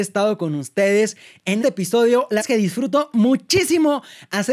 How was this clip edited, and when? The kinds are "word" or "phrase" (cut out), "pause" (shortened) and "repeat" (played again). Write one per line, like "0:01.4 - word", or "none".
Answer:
0:01.6 - word
0:02.4 - word

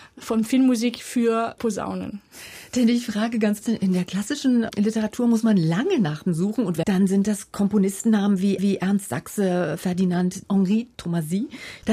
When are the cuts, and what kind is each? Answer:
0:03.6 - word
0:06.3 - word
0:06.8 - phrase
0:08.6 - repeat
0:10.4 - word

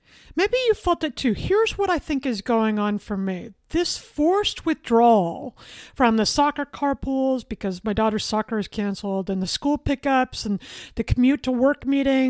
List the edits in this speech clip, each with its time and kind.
none

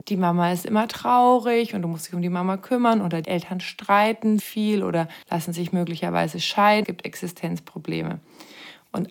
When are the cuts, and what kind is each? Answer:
0:03.2 - word
0:04.4 - word
0:05.2 - pause
0:06.8 - phrase

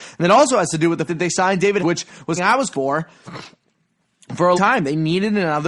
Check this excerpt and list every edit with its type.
0:01.1 - word
0:01.8 - word
0:02.4 - word
0:02.7 - word
0:04.5 - word

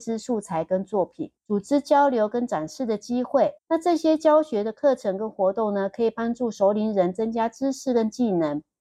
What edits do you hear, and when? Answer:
0:01.4 - pause
0:03.6 - pause

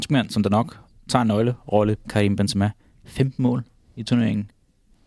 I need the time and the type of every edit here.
0:02.0 - phrase

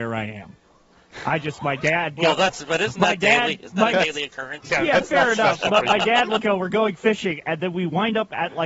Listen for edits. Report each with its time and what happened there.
0:06.4 - word

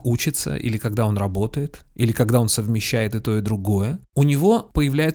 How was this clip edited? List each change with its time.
none

